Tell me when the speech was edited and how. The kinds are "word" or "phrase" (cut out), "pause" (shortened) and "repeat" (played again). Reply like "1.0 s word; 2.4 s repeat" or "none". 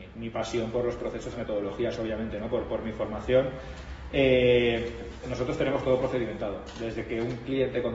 1.3 s word; 5.2 s word

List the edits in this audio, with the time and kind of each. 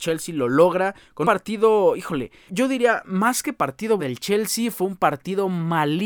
1.2 s word; 2.5 s word; 4.0 s word

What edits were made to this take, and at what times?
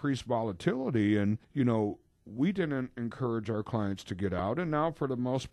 1.4 s pause

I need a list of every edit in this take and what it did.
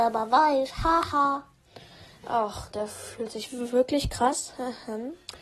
2.7 s word

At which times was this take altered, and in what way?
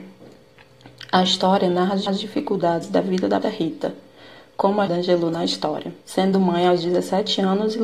2.1 s repeat; 3.4 s word; 4.9 s word; 6.0 s pause

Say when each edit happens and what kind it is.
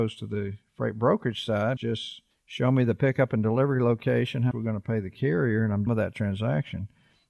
1.8 s word; 2.3 s pause; 4.5 s word; 5.9 s word

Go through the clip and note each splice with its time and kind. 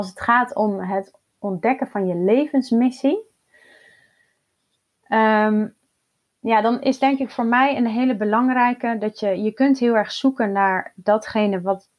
none

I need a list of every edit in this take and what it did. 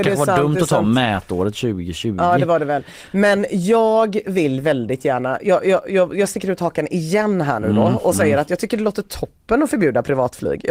none

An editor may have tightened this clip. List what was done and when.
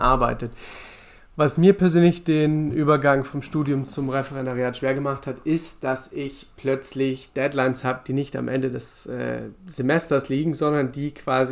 none

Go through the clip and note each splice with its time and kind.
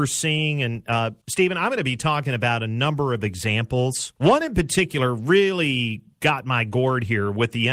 1.2 s pause; 4.2 s pause

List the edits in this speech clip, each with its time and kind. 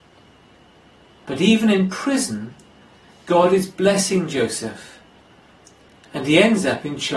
none

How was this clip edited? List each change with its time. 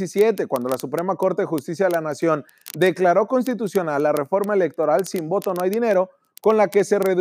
none

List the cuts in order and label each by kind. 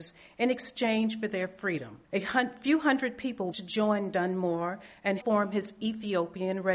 2.0 s pause; 3.5 s word; 5.2 s word

